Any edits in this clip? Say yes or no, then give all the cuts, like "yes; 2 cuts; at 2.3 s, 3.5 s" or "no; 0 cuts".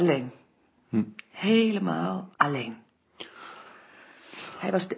yes; 1 cut; at 2.3 s